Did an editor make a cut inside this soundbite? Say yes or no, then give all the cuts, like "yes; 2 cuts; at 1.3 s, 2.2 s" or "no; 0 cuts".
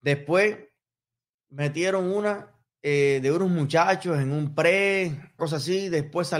yes; 2 cuts; at 2.7 s, 5.4 s